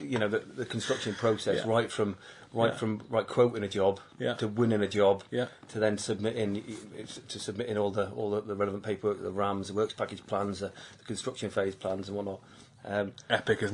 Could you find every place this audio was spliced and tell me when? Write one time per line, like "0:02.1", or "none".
none